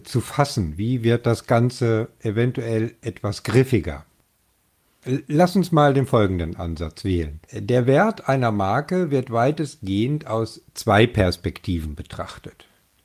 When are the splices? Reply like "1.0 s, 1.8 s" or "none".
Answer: 7.4 s

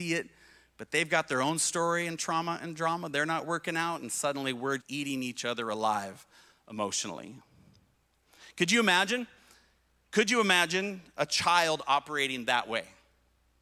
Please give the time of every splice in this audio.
4.8 s

